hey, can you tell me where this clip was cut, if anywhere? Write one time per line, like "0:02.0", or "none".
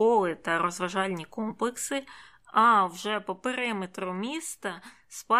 none

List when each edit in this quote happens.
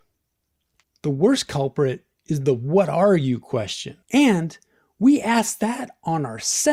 0:04.0

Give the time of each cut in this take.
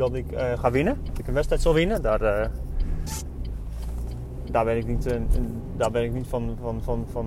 0:01.2

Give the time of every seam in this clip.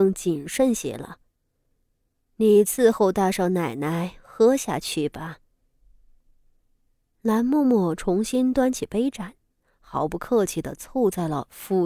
none

